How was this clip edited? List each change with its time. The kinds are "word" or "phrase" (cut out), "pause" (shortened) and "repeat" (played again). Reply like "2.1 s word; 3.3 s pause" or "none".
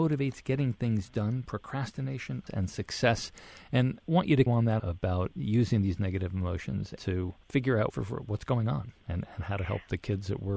2.5 s word; 4.0 s word; 4.5 s word; 4.8 s word; 7.0 s phrase; 7.4 s pause; 7.9 s word